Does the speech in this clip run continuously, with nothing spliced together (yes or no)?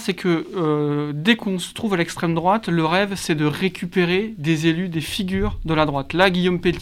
yes